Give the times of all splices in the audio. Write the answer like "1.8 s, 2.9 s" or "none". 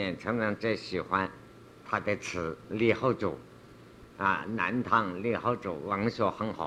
none